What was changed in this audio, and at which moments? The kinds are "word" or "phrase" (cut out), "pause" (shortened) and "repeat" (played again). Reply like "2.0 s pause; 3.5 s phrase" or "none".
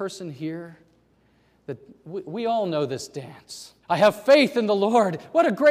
3.8 s pause